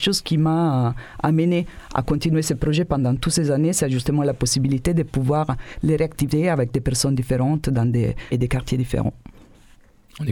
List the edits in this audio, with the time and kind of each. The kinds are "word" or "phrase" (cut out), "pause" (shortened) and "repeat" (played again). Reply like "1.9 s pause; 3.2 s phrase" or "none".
8.3 s word

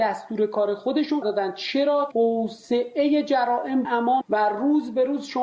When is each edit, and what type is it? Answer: 1.2 s word; 2.1 s word; 3.8 s word; 4.2 s word

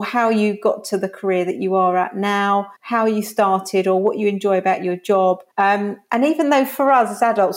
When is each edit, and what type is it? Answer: 2.8 s pause; 5.5 s pause

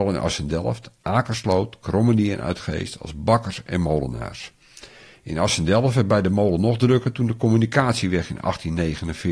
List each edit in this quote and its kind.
none

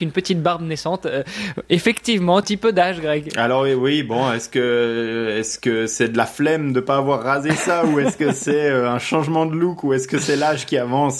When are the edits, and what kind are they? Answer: 2.4 s phrase

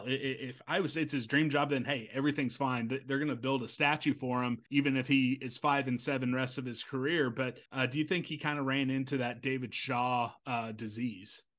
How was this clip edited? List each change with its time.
4.7 s pause; 7.7 s pause

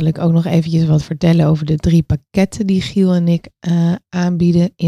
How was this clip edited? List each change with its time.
none

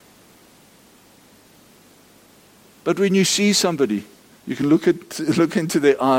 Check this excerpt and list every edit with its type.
4.3 s pause

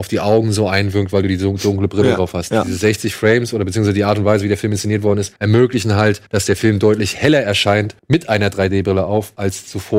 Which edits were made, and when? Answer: 5.4 s pause; 6.3 s pause; 8.0 s pause

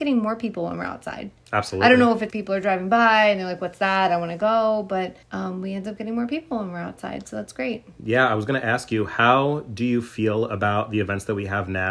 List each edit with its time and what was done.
2.3 s word; 5.2 s pause

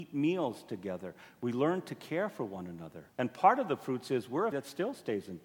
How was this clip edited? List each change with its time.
3.1 s pause; 4.5 s word

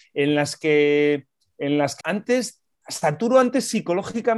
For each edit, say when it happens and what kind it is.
2.0 s word

